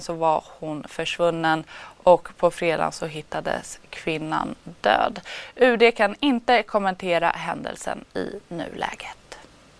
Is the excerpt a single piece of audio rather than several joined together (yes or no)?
yes